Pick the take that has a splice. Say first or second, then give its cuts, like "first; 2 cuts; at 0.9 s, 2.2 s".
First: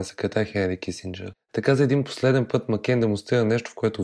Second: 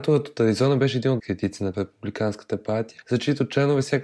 second; 2 cuts; at 1.2 s, 1.7 s